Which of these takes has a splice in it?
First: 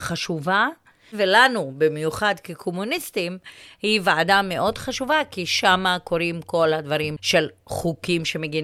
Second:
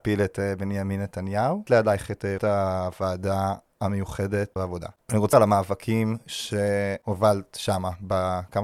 second; 4 cuts; at 1.7 s, 2.4 s, 4.6 s, 5.3 s

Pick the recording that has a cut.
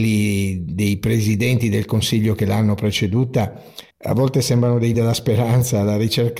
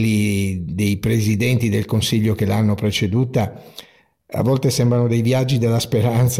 first; 2 cuts; at 3.9 s, 4.9 s

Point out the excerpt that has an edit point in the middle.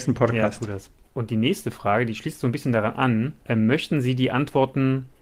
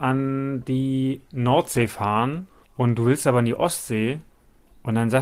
first; 1 cut; at 3.4 s

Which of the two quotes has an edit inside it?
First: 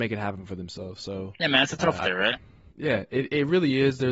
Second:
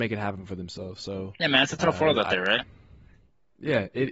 first; 2 cuts; at 2.0 s, 2.7 s

